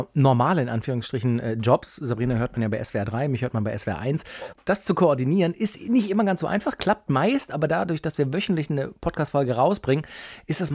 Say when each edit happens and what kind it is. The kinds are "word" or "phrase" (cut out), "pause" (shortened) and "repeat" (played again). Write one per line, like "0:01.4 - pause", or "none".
none